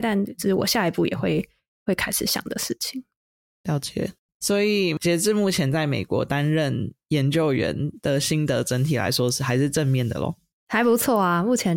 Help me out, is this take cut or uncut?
uncut